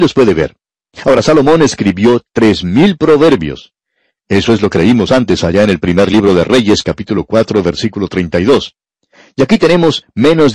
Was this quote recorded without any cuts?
yes; 0 cuts

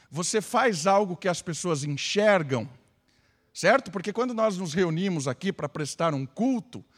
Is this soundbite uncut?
yes; 0 cuts

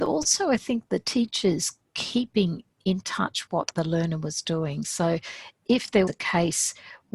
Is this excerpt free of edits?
no; 2 cuts; at 3.5 s, 6.1 s

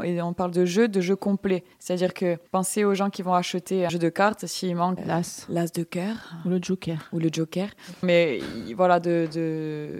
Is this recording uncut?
no; 5 cuts; at 1.7 s, 2.5 s, 3.9 s, 5.0 s, 8.0 s

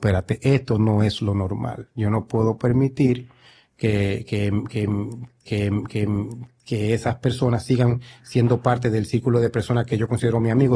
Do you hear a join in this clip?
yes; 1 cut; at 5.4 s

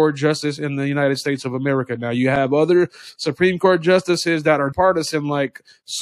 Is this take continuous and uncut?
no; 1 cut; at 4.7 s

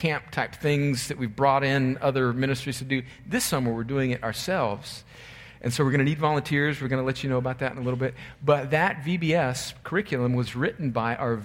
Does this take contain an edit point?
no; 0 cuts

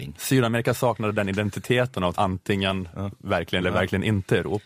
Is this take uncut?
no; 2 cuts; at 2.1 s, 3.6 s

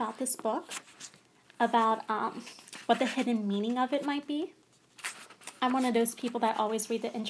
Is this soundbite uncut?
yes; 0 cuts

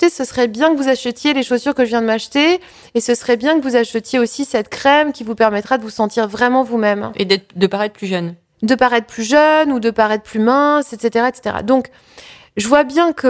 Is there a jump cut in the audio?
no; 0 cuts

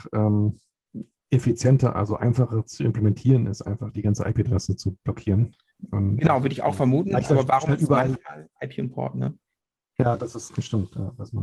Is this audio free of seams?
yes; 0 cuts

